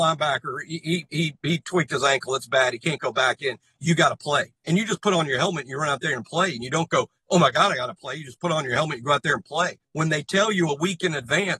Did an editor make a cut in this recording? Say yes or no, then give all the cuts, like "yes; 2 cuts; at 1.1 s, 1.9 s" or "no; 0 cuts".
yes; 2 cuts; at 4.6 s, 9.8 s